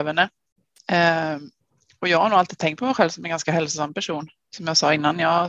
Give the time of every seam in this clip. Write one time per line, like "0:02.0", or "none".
none